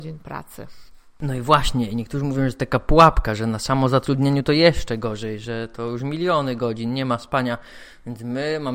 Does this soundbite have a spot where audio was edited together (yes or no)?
no